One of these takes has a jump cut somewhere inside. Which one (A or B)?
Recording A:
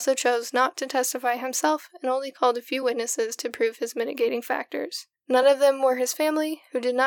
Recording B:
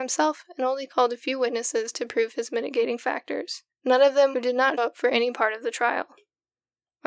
B